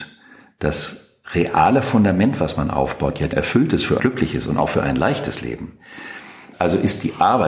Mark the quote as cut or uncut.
cut